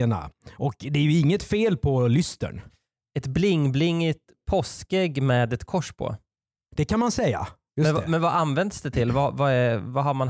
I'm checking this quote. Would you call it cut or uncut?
uncut